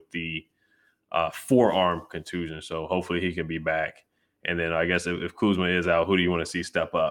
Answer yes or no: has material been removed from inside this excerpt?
no